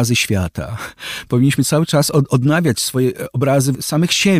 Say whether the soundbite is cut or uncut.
uncut